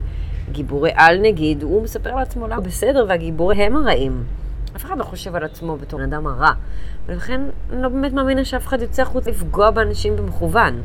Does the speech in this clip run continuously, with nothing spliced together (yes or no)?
no